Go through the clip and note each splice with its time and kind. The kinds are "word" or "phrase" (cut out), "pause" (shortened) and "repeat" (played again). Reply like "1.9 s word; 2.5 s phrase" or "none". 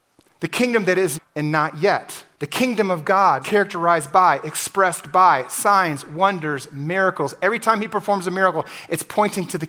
1.1 s word; 2.3 s pause; 3.4 s phrase